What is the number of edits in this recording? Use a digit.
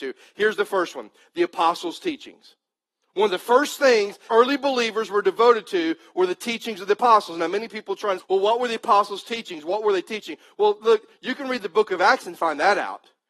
2